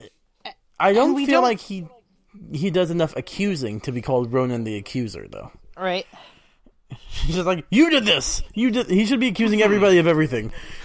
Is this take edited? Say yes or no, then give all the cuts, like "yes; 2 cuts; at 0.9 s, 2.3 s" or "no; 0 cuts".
no; 0 cuts